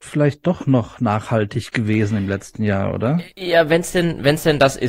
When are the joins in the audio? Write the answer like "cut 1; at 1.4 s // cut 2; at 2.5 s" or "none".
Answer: none